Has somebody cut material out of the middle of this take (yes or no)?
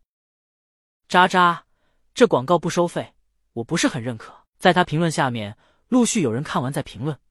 no